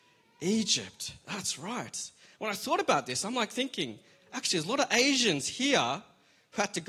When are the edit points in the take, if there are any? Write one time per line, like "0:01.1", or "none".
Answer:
none